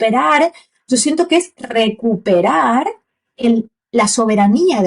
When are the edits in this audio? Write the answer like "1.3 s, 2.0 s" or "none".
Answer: 1.6 s

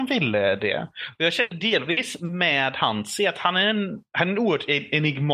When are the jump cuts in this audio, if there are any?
4.1 s

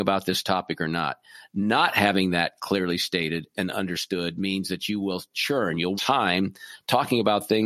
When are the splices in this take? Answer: 5.9 s

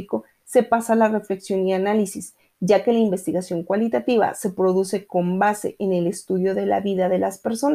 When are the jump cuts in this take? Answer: none

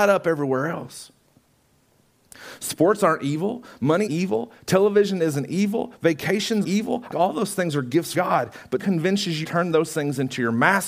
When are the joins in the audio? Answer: 4.1 s, 6.6 s, 7.1 s, 8.1 s, 8.8 s, 9.4 s

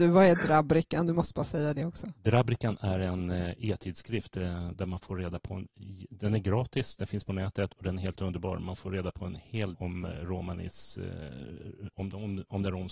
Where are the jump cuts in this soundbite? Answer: 4.7 s, 9.7 s, 11.9 s

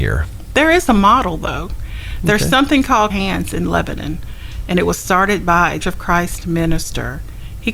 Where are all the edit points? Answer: 3.1 s, 5.8 s

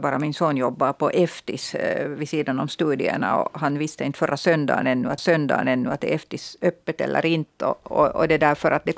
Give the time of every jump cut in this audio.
5.2 s

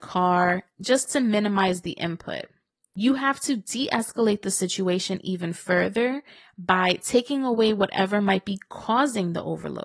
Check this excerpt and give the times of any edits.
none

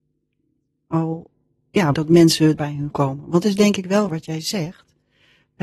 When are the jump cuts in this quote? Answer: 1.9 s, 2.6 s, 2.9 s, 3.4 s, 4.1 s

